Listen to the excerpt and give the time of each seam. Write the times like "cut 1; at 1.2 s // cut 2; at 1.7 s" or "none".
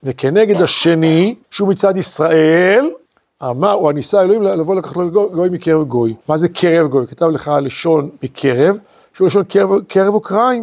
cut 1; at 1.4 s // cut 2; at 3.1 s // cut 3; at 6.2 s